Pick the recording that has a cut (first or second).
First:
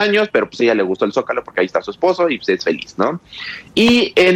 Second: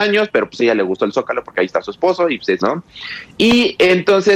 second